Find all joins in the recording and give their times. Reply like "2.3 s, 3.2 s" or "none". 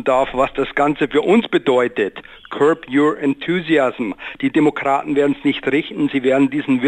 none